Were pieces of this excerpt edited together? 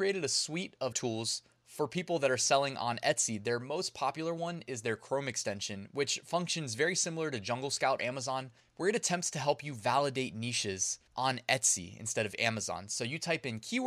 yes; 4 cuts; at 0.9 s, 8.0 s, 8.6 s, 11.1 s

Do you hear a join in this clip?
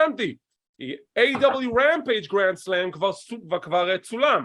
no; 0 cuts

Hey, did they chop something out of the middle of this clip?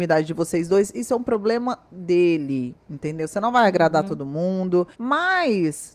yes; 1 cut; at 4.9 s

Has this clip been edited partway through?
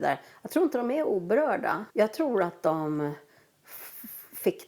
yes; 1 cut; at 1.9 s

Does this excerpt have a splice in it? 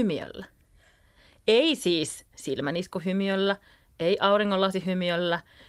no; 0 cuts

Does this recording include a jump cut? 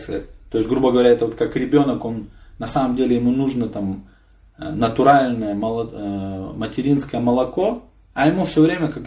no; 0 cuts

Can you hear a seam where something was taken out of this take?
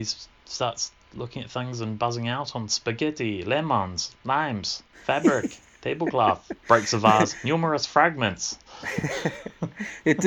yes; 1 cut; at 6.6 s

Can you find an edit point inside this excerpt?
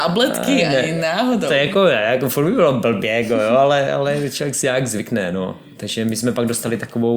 no; 0 cuts

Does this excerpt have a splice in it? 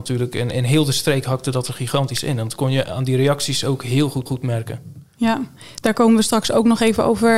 yes; 1 cut; at 4.3 s

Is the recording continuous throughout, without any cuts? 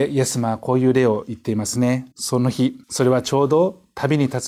no; 2 cuts; at 2.1 s, 2.8 s

